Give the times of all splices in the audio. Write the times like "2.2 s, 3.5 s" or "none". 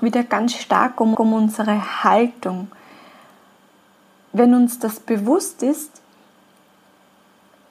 1.1 s